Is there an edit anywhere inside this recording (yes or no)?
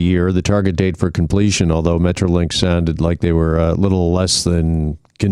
no